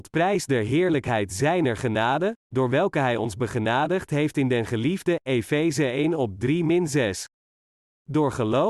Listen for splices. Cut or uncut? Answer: uncut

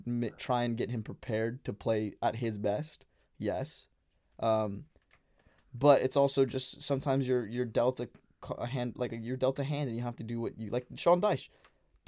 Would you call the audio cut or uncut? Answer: uncut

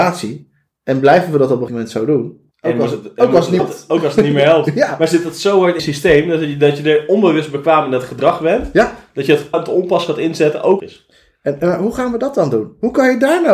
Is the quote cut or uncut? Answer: cut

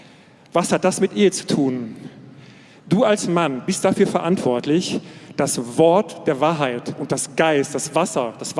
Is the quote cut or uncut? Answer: uncut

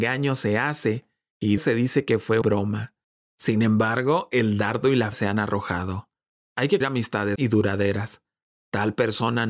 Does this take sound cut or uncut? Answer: cut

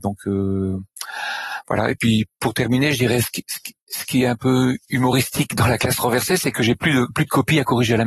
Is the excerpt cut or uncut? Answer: cut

